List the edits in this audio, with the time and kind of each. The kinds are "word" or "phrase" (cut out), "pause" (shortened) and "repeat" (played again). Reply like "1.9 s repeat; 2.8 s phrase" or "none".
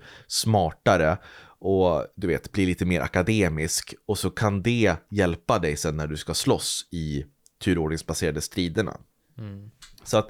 none

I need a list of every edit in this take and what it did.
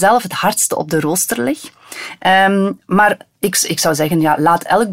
none

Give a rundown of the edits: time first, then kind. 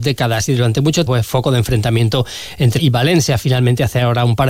1.1 s word; 2.8 s word

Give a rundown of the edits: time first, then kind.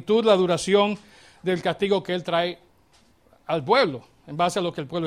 none

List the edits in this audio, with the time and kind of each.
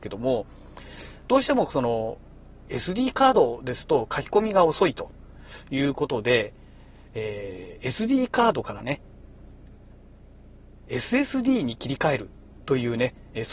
none

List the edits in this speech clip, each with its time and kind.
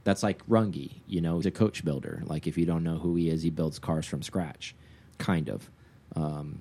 1.4 s word; 5.1 s word

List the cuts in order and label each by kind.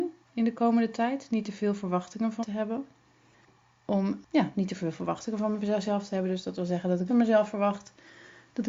2.4 s word; 4.3 s pause; 7.1 s word

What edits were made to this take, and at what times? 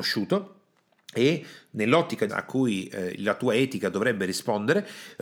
2.3 s phrase

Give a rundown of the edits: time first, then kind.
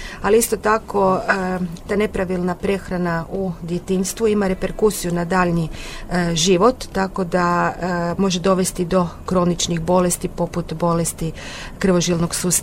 none

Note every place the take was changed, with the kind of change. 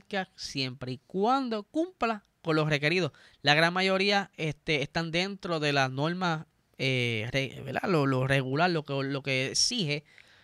none

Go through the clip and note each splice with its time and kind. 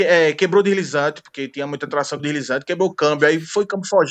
2.2 s word

